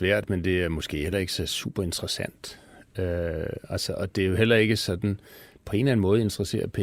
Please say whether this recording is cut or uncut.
uncut